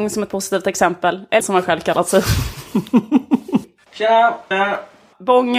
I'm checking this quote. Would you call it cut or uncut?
cut